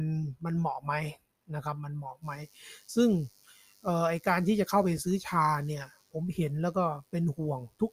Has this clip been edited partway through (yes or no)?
no